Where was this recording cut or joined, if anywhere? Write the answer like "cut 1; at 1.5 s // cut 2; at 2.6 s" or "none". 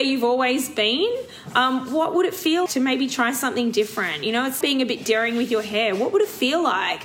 cut 1; at 2.7 s // cut 2; at 4.6 s